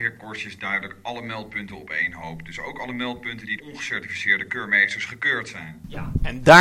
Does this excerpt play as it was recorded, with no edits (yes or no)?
no